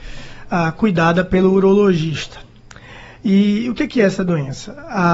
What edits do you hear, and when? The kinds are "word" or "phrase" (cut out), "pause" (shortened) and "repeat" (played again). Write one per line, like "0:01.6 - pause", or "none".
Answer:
none

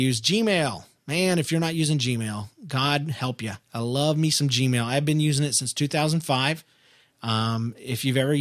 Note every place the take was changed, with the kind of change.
0:03.6 - pause

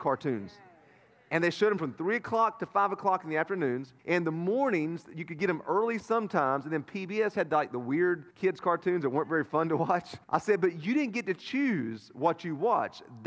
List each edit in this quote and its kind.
0:04.0 - pause
0:08.3 - pause
0:10.2 - pause

